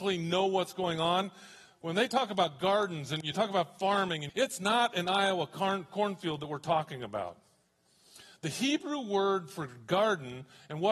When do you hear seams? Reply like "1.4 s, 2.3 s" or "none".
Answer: 4.3 s